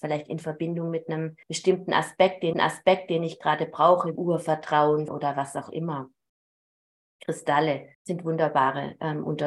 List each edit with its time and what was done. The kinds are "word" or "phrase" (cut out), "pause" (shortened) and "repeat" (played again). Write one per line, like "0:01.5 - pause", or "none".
0:01.4 - pause
0:02.5 - repeat
0:04.2 - word
0:05.1 - word
0:07.9 - pause

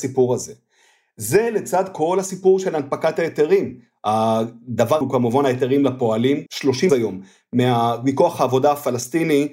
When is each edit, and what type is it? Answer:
0:05.0 - word
0:06.5 - word
0:06.9 - word

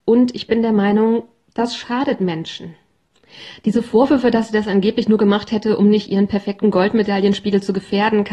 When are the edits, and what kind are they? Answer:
none

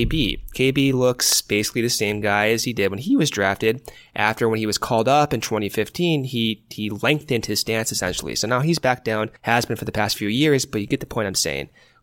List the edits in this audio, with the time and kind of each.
0:09.4 - pause

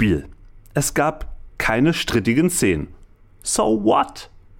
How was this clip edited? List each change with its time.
none

